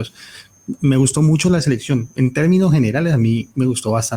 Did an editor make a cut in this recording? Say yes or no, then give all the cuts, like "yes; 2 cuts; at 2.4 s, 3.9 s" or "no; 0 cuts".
no; 0 cuts